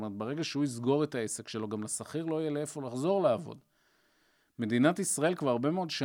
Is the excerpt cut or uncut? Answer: uncut